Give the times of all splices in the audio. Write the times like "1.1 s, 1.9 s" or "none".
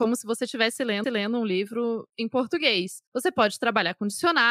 1.0 s